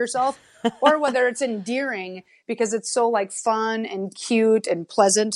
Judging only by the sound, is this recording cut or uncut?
uncut